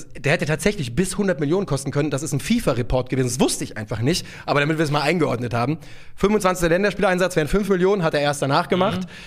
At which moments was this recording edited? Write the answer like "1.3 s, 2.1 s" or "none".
none